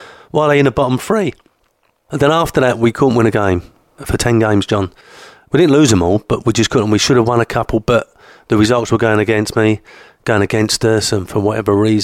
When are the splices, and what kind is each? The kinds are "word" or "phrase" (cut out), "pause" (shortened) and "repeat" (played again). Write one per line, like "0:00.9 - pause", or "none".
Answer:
none